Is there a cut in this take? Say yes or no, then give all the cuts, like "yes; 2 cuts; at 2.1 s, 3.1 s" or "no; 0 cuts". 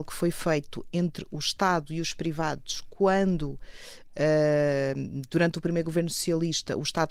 no; 0 cuts